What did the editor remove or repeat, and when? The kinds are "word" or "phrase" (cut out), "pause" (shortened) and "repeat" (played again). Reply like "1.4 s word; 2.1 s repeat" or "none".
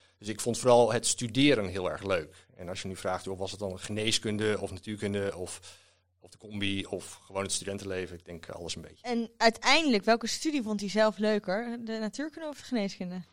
none

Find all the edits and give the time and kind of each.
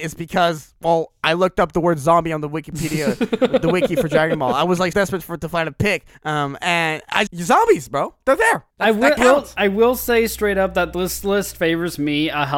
4.9 s word; 6.1 s pause; 7.3 s word; 8.7 s pause; 9.2 s word

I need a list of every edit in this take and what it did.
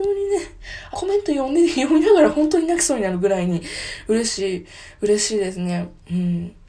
0.9 s phrase

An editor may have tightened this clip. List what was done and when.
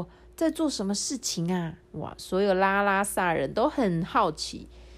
1.8 s pause

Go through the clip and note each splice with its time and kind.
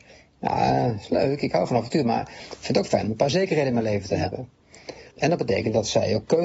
5.1 s pause

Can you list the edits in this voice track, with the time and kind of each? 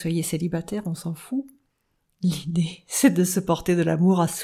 none

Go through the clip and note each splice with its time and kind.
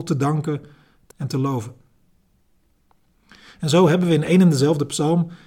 1.1 s word

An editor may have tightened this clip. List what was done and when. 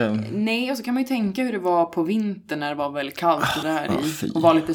3.6 s word

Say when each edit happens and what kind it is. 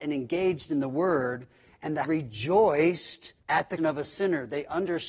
2.0 s word; 3.4 s pause; 3.8 s word

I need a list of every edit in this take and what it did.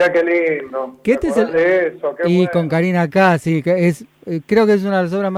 none

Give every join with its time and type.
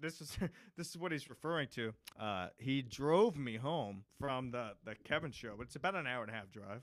2.1 s pause; 4.1 s pause

